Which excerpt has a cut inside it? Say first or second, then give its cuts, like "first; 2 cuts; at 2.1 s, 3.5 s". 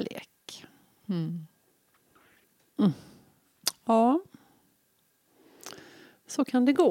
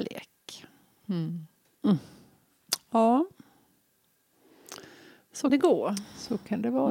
second; 2 cuts; at 1.6 s, 5.5 s